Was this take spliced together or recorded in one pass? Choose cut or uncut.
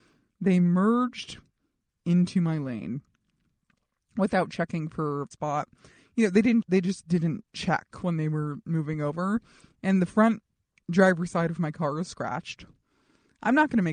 cut